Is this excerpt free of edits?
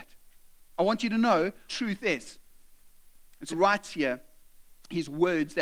no; 2 cuts; at 1.7 s, 3.5 s

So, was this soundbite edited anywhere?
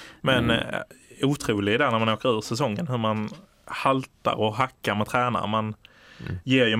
no; 0 cuts

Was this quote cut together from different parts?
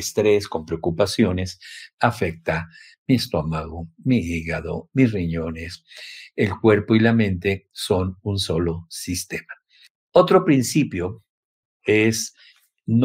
no; 0 cuts

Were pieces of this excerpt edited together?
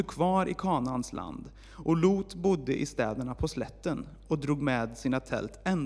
no; 0 cuts

